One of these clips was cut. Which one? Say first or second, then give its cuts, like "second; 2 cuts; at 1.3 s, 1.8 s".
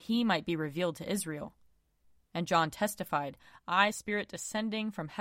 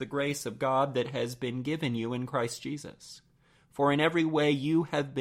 first; 1 cut; at 3.9 s